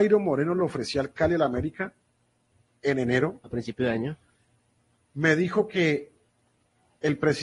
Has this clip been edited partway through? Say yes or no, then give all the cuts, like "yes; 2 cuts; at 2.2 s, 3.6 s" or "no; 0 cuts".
no; 0 cuts